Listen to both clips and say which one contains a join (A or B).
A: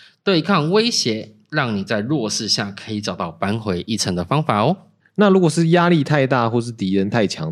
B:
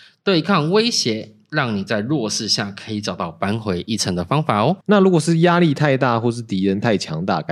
B